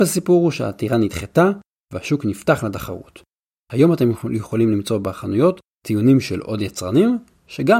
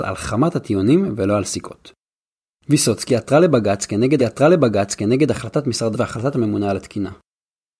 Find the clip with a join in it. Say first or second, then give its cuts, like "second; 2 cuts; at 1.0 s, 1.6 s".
second; 2 cuts; at 4.2 s, 5.9 s